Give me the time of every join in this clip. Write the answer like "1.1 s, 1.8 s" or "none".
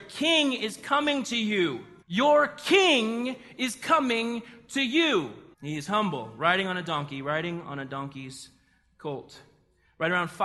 2.0 s, 5.5 s